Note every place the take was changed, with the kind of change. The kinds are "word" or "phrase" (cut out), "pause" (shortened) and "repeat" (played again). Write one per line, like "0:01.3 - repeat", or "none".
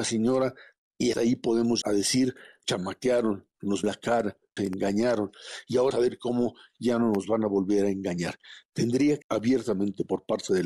0:01.1 - word
0:01.8 - word
0:02.6 - word
0:03.8 - word
0:04.6 - word
0:05.9 - word
0:09.2 - word

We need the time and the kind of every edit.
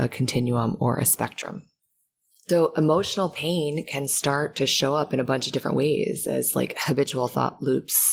none

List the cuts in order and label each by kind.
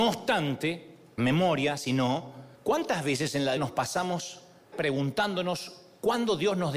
0:01.2 - word
0:02.5 - pause
0:03.6 - word
0:04.7 - word

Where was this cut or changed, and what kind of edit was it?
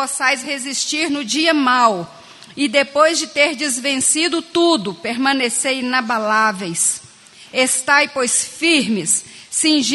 none

